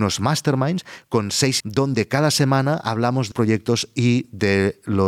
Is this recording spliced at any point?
yes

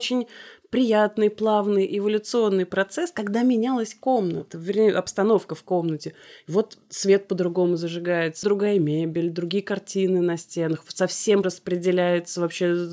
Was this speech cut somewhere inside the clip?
yes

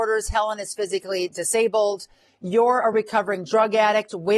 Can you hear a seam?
no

